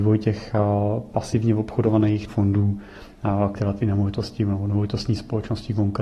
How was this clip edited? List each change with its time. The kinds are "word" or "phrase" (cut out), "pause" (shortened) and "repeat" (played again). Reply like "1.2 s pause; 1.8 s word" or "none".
2.3 s word; 3.5 s word